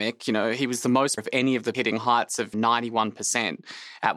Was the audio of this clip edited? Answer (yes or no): yes